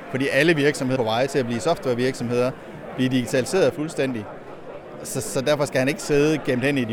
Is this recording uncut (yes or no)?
no